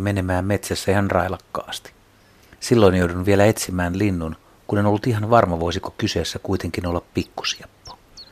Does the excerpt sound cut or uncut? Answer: uncut